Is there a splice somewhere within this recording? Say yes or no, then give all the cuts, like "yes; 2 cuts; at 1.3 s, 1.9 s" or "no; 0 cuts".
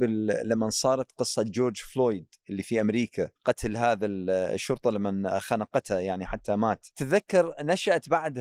yes; 2 cuts; at 3.4 s, 6.9 s